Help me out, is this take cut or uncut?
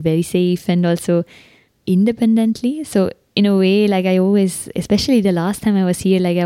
cut